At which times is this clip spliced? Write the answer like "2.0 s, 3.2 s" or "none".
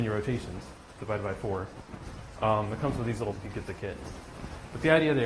3.3 s